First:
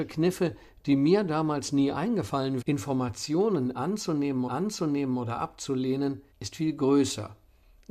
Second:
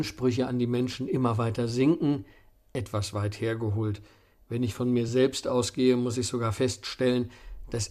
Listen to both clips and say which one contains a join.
first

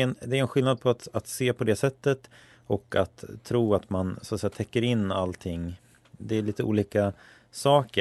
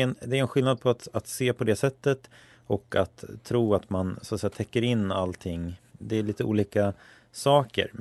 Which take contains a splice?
second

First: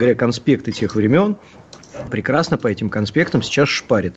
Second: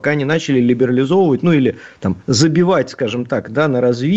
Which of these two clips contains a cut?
first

